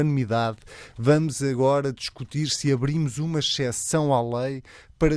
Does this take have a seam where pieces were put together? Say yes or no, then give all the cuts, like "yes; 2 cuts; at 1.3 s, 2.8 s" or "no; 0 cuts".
no; 0 cuts